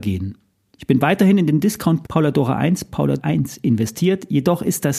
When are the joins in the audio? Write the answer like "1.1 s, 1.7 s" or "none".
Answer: 2.0 s, 3.2 s